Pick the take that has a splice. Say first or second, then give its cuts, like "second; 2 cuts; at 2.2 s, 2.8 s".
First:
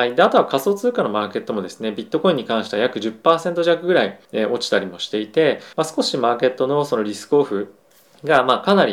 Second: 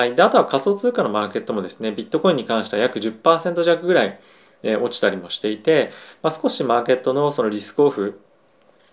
first; 3 cuts; at 4.2 s, 5.7 s, 7.9 s